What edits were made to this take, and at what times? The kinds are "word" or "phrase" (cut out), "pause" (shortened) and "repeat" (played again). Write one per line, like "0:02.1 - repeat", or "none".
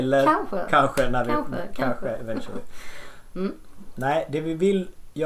none